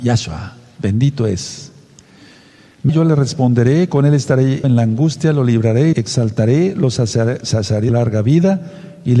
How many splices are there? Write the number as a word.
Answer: four